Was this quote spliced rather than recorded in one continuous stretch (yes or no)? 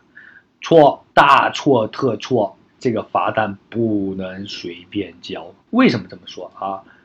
yes